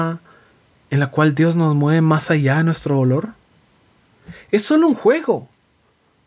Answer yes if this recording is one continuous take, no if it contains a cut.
yes